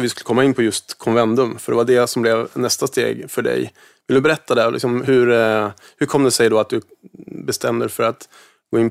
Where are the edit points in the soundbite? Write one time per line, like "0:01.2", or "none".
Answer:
none